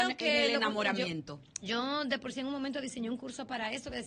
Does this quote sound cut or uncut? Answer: cut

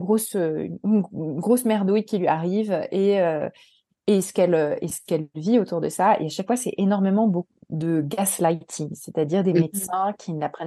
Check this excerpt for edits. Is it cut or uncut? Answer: uncut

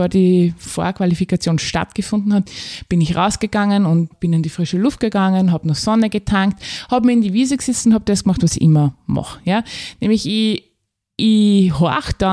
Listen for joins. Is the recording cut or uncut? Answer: uncut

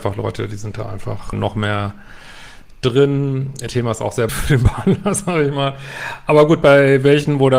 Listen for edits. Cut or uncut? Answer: cut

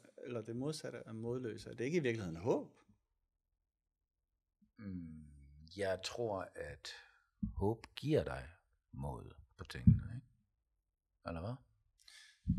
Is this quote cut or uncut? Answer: uncut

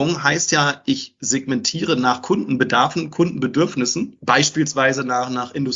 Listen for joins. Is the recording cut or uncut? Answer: uncut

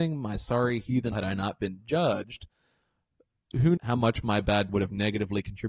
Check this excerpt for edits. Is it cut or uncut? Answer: cut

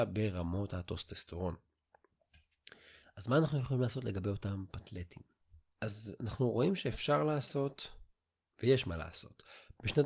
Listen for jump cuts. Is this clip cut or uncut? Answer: uncut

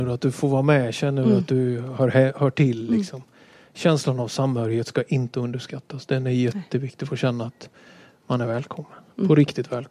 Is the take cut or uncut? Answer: uncut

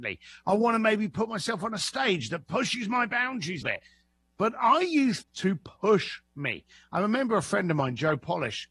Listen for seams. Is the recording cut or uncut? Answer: cut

